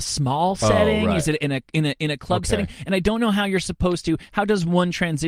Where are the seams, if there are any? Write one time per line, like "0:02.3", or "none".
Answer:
none